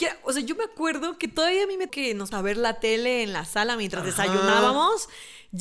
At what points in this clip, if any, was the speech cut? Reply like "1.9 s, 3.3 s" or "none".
1.9 s, 2.3 s